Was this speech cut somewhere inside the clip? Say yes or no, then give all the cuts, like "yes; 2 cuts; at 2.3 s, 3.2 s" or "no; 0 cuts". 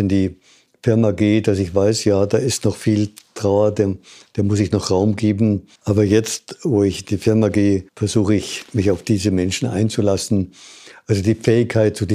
yes; 2 cuts; at 5.8 s, 7.9 s